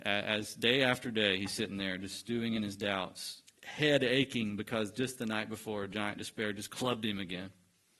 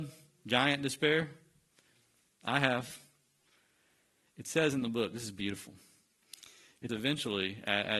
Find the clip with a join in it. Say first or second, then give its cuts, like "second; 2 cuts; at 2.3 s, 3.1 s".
second; 1 cut; at 6.9 s